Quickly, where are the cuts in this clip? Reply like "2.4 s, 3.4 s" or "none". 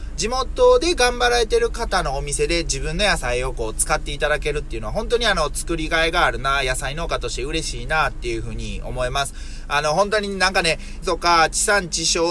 11.0 s